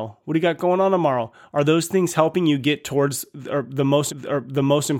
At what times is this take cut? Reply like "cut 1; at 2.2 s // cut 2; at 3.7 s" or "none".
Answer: cut 1; at 4.1 s

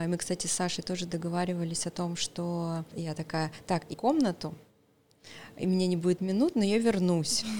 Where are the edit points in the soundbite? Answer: cut 1; at 2.9 s // cut 2; at 3.9 s // cut 3; at 6.2 s

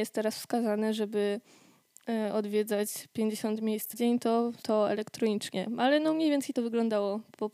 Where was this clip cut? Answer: cut 1; at 3.9 s // cut 2; at 4.6 s // cut 3; at 6.5 s

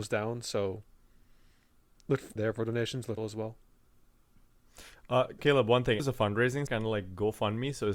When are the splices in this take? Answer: cut 1; at 2.4 s // cut 2; at 3.2 s // cut 3; at 5.4 s // cut 4; at 6.0 s // cut 5; at 6.7 s

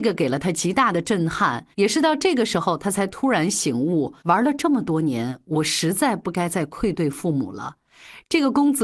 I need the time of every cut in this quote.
cut 1; at 1.7 s // cut 2; at 4.2 s

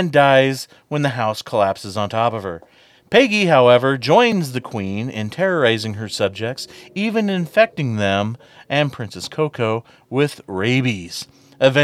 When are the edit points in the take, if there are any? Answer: none

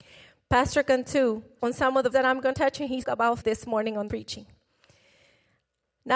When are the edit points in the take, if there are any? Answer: cut 1; at 1.6 s // cut 2; at 2.1 s // cut 3; at 2.5 s // cut 4; at 3.0 s // cut 5; at 3.4 s // cut 6; at 4.1 s

